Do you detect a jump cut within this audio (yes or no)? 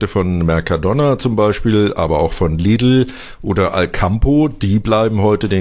no